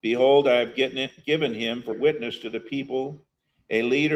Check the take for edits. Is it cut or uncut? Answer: cut